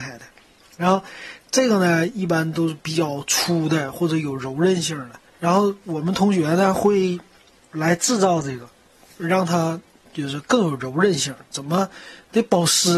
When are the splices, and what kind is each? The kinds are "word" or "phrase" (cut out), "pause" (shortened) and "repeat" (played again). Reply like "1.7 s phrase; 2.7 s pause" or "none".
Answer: 5.3 s pause